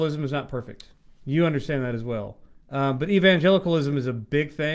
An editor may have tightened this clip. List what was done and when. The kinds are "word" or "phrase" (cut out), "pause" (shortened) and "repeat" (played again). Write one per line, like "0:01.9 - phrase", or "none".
0:01.1 - pause
0:02.5 - pause

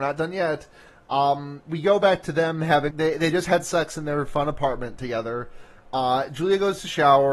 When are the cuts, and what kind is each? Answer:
0:02.9 - word

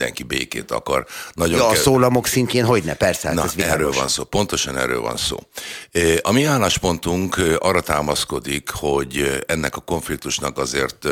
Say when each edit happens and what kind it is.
none

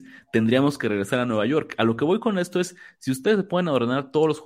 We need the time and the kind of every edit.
none

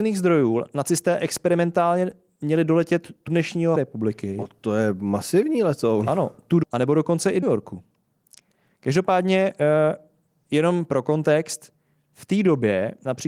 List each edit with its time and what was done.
0:03.3 - word
0:03.8 - word
0:06.6 - word
0:07.4 - word

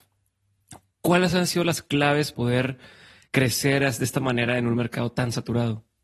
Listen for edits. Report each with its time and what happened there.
0:00.9 - pause
0:02.3 - word
0:03.3 - word

